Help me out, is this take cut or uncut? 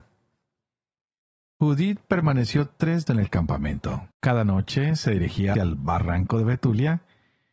cut